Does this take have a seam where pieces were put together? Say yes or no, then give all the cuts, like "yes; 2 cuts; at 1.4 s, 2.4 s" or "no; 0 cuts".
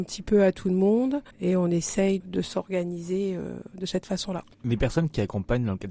yes; 2 cuts; at 1.3 s, 2.2 s